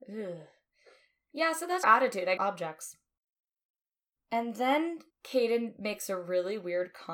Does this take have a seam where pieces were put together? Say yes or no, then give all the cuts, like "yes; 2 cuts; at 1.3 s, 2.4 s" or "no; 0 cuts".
yes; 3 cuts; at 1.8 s, 2.4 s, 5.1 s